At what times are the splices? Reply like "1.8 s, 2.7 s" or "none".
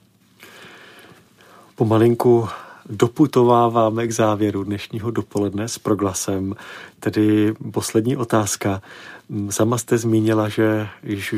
none